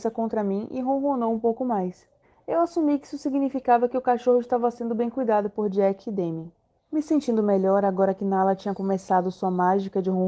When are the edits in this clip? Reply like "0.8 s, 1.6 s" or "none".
2.2 s, 6.8 s